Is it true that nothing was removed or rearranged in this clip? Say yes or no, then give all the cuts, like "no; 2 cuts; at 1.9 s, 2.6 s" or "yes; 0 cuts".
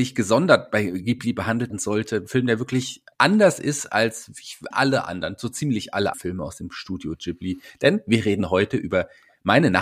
no; 4 cuts; at 1.7 s, 3.1 s, 4.7 s, 6.1 s